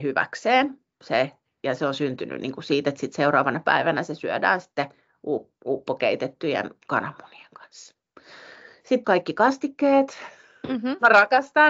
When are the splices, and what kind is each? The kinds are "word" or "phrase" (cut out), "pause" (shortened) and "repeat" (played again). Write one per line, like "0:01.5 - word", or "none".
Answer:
0:09.0 - word